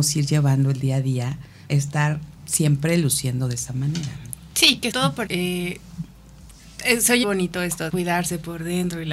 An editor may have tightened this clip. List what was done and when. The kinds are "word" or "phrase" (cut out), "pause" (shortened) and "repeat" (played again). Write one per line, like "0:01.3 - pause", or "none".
0:01.7 - word
0:02.3 - word
0:04.9 - word
0:05.3 - word
0:07.2 - word
0:07.9 - word